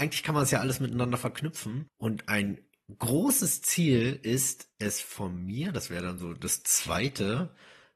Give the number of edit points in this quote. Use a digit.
0